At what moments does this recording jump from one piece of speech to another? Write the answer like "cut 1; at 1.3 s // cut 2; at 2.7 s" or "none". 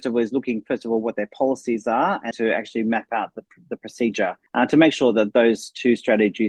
cut 1; at 2.3 s // cut 2; at 4.5 s